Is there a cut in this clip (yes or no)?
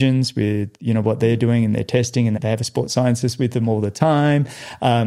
yes